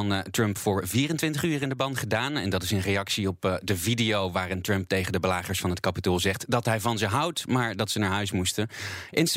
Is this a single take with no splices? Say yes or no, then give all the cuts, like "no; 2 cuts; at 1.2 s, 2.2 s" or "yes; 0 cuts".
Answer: yes; 0 cuts